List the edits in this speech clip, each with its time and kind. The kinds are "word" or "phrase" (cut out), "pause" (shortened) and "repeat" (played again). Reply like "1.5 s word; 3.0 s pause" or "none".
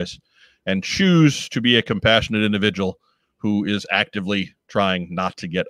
none